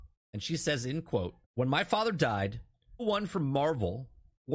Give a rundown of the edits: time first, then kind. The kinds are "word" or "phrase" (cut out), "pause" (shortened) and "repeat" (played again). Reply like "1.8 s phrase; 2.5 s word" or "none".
1.4 s pause; 3.0 s word